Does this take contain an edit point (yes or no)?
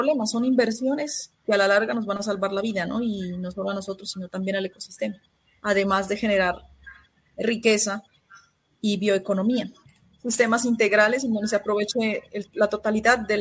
no